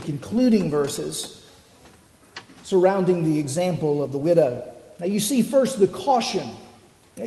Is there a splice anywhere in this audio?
no; 0 cuts

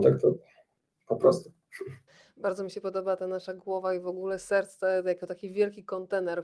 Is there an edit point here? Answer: yes; 1 cut; at 2.1 s

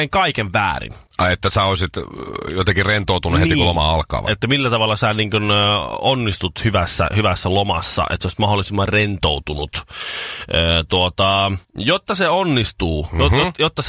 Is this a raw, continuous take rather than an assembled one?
no; 2 cuts; at 1.1 s, 11.6 s

